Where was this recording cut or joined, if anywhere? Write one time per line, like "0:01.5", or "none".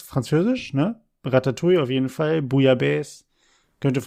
none